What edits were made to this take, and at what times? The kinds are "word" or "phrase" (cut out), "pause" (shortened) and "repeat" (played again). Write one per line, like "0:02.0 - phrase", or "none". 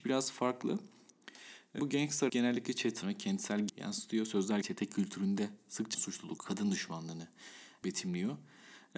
0:01.8 - word
0:02.3 - word
0:03.0 - word
0:03.7 - word
0:04.6 - word
0:05.9 - word
0:06.4 - word
0:07.8 - word